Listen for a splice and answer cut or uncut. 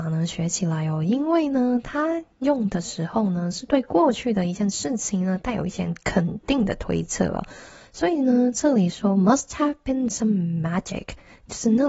uncut